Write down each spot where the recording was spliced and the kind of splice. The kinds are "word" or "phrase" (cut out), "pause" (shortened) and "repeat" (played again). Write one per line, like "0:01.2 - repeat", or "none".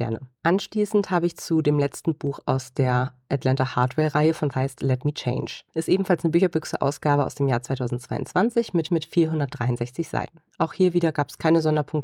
0:04.5 - phrase
0:08.9 - repeat